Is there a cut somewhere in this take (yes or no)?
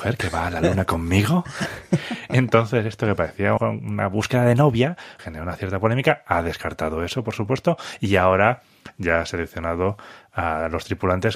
yes